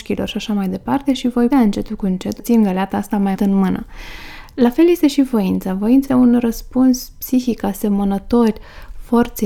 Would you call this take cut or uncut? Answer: cut